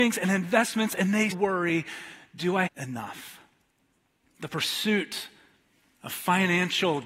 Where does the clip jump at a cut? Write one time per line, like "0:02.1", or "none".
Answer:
0:01.3
0:02.7